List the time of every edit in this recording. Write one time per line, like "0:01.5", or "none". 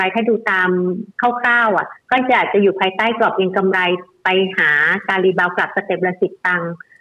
0:02.0